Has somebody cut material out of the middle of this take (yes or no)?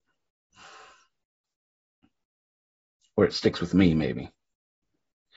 no